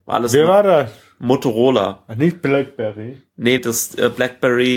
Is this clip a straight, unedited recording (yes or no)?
no